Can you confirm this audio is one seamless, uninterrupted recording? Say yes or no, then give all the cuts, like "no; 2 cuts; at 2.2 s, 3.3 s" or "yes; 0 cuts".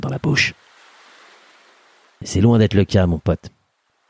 yes; 0 cuts